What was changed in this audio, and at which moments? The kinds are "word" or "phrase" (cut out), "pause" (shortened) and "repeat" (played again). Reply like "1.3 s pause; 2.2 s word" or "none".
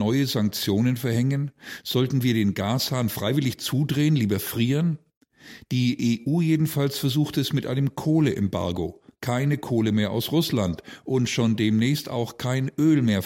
none